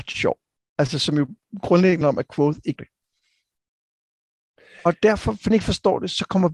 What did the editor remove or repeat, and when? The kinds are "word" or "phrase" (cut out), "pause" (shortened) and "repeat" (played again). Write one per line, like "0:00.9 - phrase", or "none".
0:02.0 - word
0:02.8 - word
0:05.5 - word